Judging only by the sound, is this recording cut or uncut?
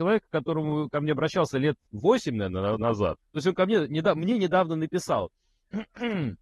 cut